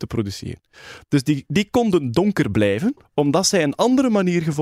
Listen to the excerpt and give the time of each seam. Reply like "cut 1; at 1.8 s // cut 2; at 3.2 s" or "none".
cut 1; at 3.0 s